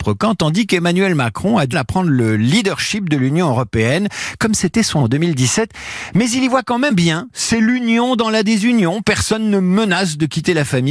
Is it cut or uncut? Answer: cut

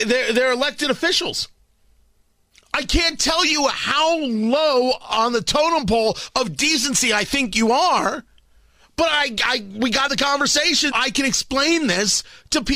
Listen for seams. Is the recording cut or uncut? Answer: cut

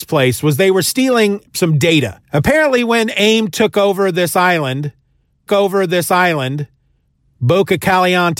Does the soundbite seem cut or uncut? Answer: cut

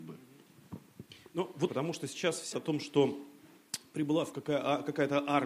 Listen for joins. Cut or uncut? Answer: cut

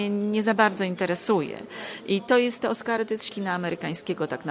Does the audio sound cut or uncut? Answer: cut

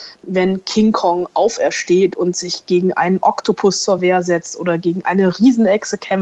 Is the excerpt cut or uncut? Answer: uncut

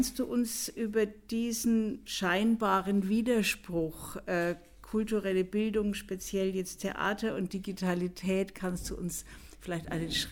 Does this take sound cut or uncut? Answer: uncut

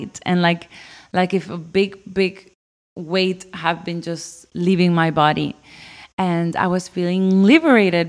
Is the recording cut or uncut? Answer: uncut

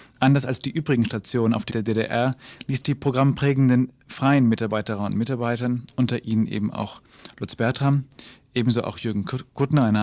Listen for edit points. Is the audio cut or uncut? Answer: cut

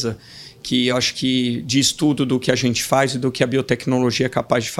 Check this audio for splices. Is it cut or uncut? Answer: uncut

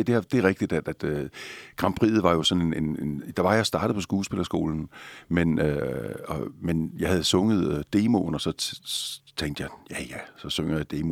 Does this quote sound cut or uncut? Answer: uncut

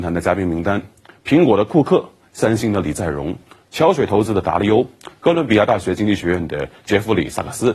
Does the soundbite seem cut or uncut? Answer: uncut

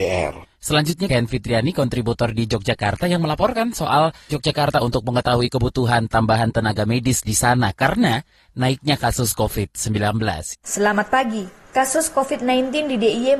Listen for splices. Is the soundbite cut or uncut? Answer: uncut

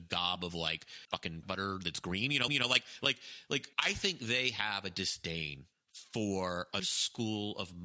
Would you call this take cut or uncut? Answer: cut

